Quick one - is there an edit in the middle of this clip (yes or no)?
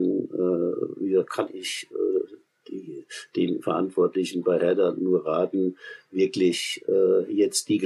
no